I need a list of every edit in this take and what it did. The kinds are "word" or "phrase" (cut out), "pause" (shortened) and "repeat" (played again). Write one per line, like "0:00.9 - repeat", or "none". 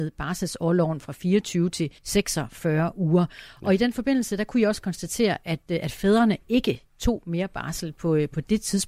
0:02.0 - pause
0:06.9 - pause